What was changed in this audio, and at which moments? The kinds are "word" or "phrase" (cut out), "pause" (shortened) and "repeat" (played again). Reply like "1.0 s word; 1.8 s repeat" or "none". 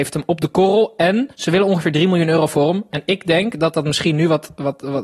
1.3 s pause